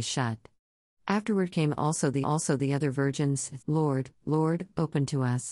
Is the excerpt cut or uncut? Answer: cut